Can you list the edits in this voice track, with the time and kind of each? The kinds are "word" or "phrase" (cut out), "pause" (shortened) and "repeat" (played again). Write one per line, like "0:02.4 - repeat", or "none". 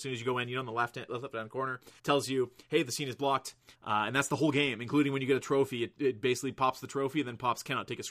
0:02.0 - pause
0:03.7 - pause